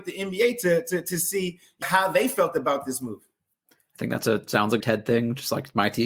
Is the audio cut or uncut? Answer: cut